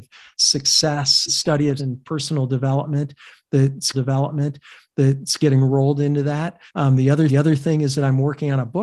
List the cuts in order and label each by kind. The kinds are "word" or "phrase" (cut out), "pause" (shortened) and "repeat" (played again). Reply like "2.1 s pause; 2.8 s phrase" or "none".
1.3 s word; 1.8 s word; 3.9 s repeat; 6.7 s pause; 7.3 s repeat

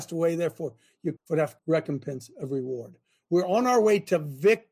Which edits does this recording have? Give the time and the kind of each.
1.2 s word; 1.6 s word

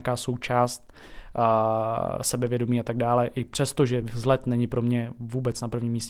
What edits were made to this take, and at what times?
none

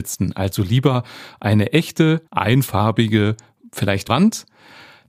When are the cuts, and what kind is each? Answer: 2.3 s pause; 4.1 s word

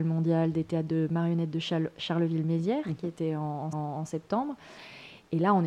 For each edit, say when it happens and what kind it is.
3.7 s repeat

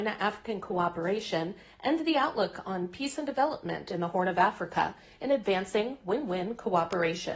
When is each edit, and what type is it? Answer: none

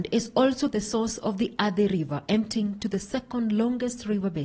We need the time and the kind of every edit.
none

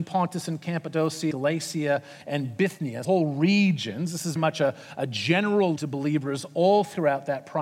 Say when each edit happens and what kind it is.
1.3 s word; 3.0 s word; 4.4 s word; 5.8 s word

